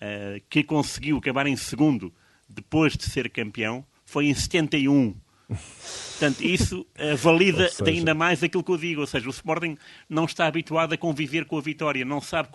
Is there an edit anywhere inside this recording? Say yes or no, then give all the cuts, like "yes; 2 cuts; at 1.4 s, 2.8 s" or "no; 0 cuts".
no; 0 cuts